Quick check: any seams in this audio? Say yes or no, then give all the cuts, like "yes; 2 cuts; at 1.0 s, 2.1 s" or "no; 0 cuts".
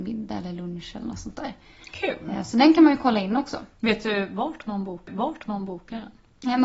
yes; 1 cut; at 5.1 s